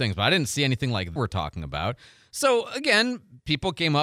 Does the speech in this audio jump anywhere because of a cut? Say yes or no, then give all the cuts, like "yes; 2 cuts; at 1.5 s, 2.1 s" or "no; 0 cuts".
yes; 1 cut; at 1.2 s